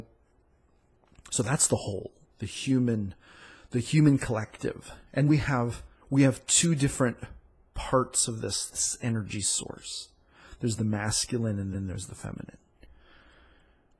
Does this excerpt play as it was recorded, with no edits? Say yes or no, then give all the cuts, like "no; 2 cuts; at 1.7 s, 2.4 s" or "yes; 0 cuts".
no; 4 cuts; at 2.2 s, 5.3 s, 5.9 s, 11.7 s